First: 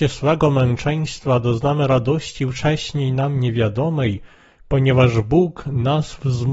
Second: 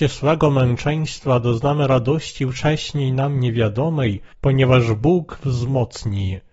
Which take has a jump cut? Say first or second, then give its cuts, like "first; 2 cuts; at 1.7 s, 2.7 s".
second; 2 cuts; at 4.3 s, 5.4 s